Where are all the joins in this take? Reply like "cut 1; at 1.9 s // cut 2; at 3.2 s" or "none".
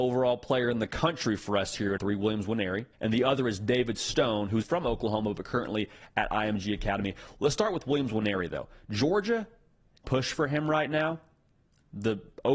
cut 1; at 2.0 s // cut 2; at 2.9 s // cut 3; at 4.6 s // cut 4; at 10.0 s

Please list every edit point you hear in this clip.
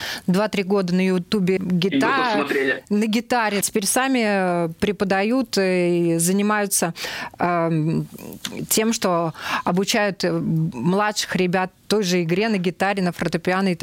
cut 1; at 1.6 s // cut 2; at 3.6 s

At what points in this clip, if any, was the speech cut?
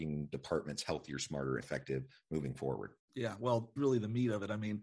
cut 1; at 1.6 s // cut 2; at 3.0 s // cut 3; at 3.8 s

